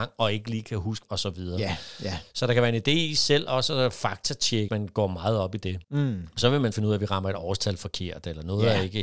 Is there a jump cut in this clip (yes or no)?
yes